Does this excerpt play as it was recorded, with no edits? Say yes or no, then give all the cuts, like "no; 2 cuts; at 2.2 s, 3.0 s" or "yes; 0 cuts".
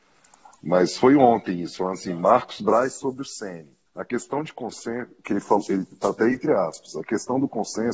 no; 1 cut; at 3.9 s